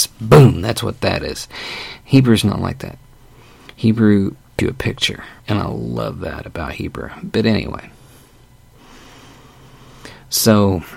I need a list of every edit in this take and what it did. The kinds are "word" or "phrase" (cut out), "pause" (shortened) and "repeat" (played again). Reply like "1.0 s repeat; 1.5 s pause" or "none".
4.6 s word; 5.4 s pause

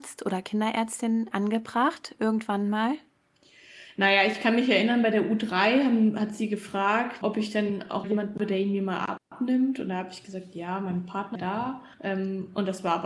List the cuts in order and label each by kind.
1.3 s word; 7.2 s word; 8.0 s word; 8.4 s word; 11.3 s phrase; 11.9 s pause

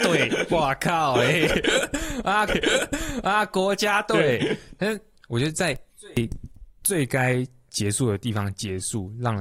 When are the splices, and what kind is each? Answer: 2.5 s repeat; 5.9 s pause

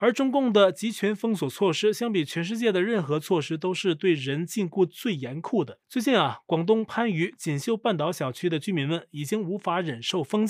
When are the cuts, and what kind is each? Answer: 5.8 s pause

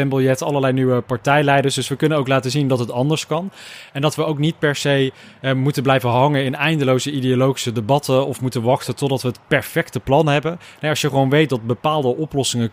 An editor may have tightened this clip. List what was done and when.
none

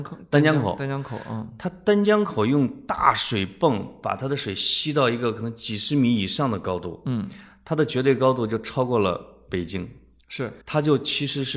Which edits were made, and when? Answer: 10.6 s pause

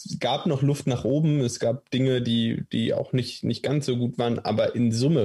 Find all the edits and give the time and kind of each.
none

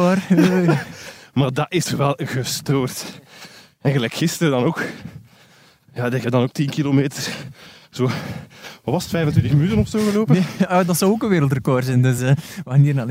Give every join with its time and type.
none

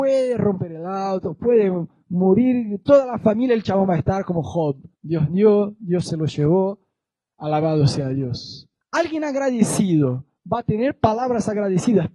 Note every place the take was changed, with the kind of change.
4.9 s pause

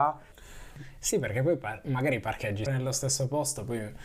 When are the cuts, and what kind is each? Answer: 2.7 s word

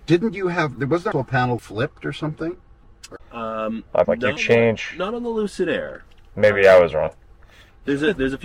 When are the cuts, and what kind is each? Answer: 1.1 s word; 1.6 s word; 4.0 s word; 4.4 s word

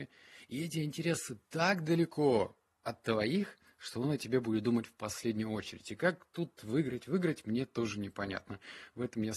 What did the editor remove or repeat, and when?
none

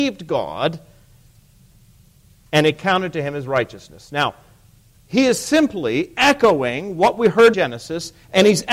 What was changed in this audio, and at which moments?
7.5 s word

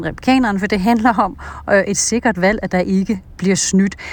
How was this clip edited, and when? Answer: none

